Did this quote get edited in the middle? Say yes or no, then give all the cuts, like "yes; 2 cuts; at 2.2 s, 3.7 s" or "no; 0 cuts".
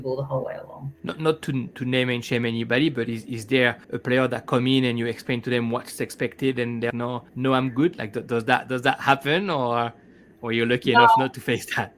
yes; 4 cuts; at 0.9 s, 3.8 s, 6.9 s, 7.3 s